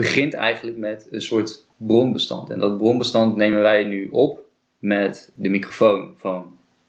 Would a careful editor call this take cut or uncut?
uncut